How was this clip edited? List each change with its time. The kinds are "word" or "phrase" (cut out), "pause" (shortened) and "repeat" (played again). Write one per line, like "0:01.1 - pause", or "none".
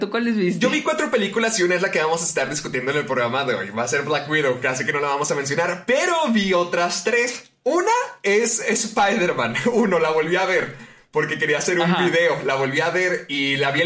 none